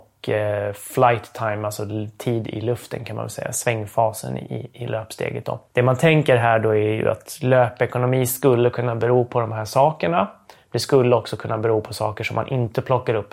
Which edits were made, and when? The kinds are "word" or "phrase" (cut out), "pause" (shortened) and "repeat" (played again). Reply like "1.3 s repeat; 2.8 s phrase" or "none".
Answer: none

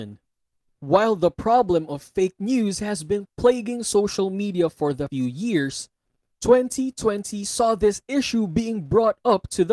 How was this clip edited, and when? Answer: 5.1 s word

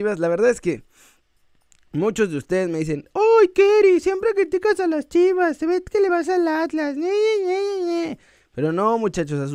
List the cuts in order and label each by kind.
none

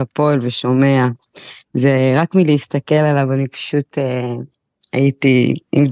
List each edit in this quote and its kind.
none

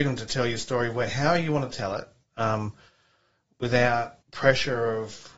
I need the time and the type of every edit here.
4.2 s pause

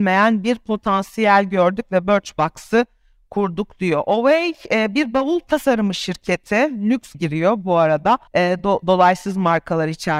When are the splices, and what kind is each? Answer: 7.1 s word; 8.3 s pause

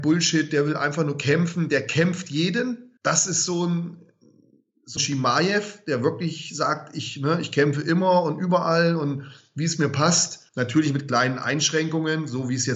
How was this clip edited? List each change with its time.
3.0 s pause; 5.0 s phrase; 10.5 s pause

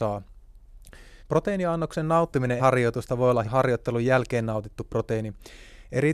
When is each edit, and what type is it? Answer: 1.2 s pause; 2.6 s word; 3.4 s phrase

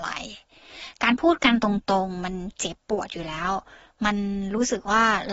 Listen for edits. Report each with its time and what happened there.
none

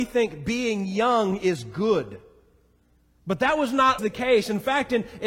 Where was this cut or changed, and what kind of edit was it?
4.0 s word

